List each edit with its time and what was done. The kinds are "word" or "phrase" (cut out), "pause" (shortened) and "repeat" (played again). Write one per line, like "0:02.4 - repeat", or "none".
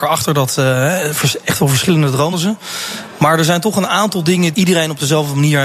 0:02.3 - word
0:04.5 - word